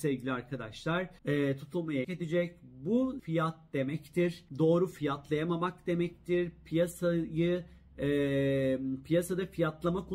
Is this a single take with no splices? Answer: no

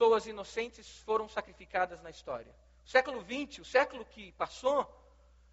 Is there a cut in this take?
no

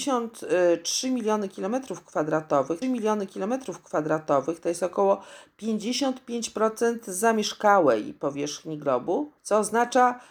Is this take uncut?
no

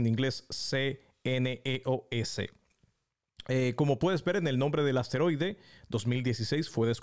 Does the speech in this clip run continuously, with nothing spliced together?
yes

